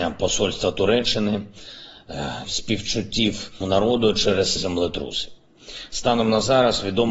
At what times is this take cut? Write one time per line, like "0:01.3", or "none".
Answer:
0:02.4
0:03.6
0:04.6